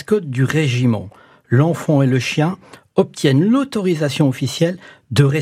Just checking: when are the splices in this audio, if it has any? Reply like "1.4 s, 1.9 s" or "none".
none